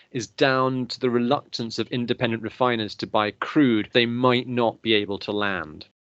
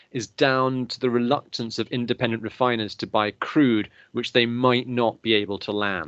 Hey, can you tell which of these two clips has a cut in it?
first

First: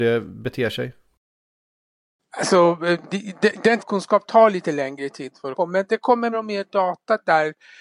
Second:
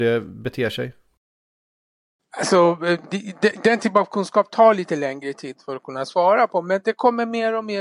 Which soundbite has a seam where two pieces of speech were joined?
first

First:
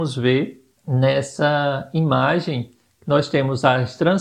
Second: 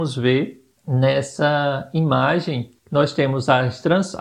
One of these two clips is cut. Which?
second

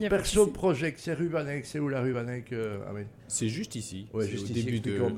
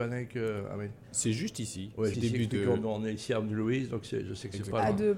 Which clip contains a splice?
second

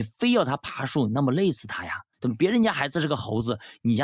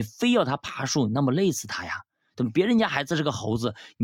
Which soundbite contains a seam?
first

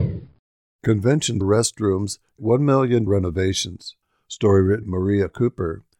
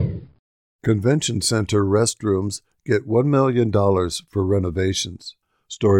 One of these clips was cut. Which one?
first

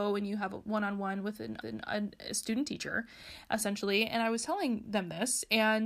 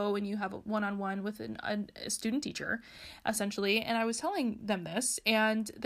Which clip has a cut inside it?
first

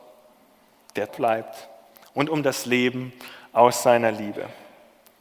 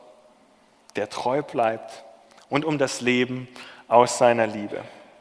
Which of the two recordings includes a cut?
first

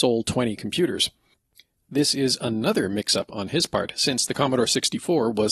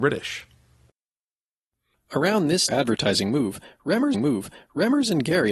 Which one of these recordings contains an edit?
second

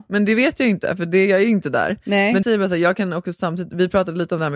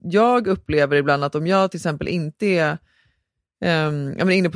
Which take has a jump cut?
first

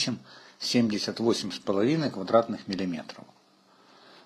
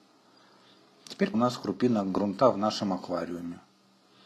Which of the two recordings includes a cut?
second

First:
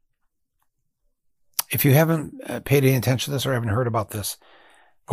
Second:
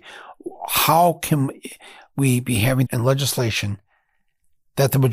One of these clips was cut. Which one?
second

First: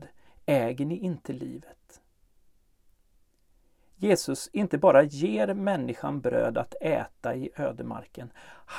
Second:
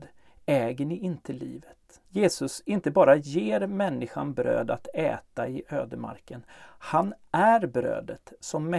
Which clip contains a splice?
second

